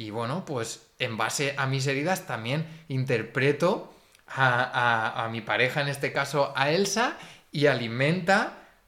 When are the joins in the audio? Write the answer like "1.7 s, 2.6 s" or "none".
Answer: none